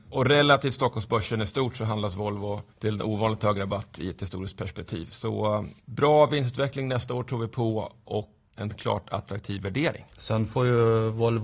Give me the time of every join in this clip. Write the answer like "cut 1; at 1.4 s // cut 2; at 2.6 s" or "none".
cut 1; at 2.7 s // cut 2; at 5.8 s